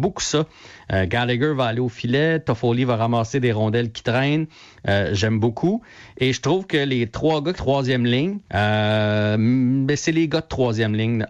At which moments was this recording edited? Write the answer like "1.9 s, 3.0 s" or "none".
7.6 s, 8.5 s